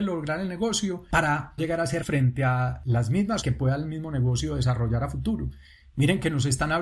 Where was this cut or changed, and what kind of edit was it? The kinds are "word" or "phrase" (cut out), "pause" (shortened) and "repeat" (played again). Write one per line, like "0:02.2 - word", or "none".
0:01.6 - word
0:02.0 - word
0:03.4 - word